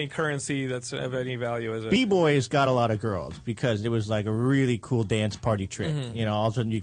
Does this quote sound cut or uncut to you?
uncut